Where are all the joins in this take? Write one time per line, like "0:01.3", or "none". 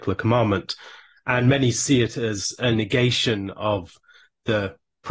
none